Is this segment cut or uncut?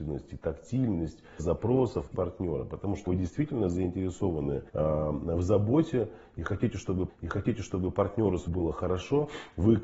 cut